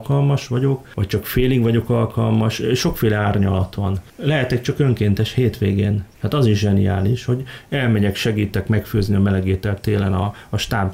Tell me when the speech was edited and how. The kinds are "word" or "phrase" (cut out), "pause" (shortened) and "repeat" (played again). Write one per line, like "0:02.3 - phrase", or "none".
0:06.1 - pause